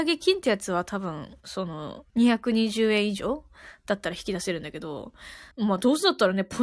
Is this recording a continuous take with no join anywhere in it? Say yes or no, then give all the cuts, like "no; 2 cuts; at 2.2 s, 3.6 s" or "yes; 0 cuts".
no; 2 cuts; at 2.1 s, 5.5 s